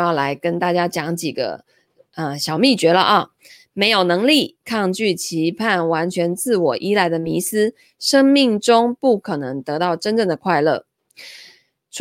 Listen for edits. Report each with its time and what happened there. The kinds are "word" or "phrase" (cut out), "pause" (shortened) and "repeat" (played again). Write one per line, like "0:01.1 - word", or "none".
none